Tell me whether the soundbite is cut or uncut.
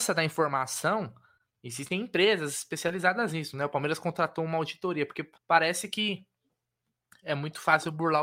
cut